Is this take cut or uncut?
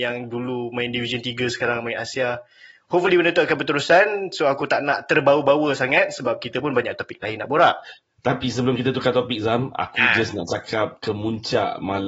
uncut